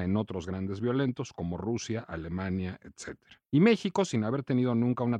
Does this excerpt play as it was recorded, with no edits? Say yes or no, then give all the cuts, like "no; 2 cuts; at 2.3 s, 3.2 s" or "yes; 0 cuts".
yes; 0 cuts